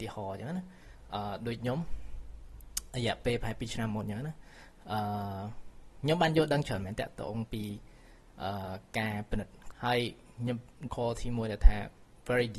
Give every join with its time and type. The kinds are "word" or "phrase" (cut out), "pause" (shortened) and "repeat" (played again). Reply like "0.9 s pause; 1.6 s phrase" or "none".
9.7 s word; 10.9 s word